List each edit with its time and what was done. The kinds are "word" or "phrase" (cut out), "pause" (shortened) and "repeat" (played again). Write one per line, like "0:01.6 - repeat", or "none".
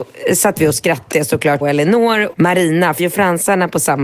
0:01.1 - word
0:01.6 - word
0:02.3 - word
0:03.0 - word